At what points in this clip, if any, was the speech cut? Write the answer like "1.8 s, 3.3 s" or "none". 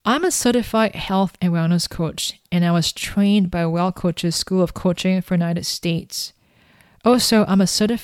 none